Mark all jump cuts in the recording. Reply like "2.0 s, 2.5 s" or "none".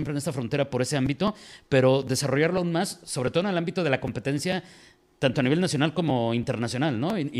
none